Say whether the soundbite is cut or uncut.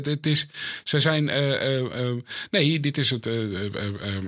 uncut